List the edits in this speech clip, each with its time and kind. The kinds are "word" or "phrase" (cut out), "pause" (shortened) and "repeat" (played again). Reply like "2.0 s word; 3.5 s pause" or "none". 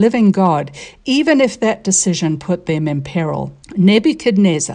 3.6 s pause